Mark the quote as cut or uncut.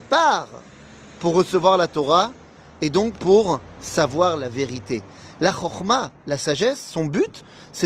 uncut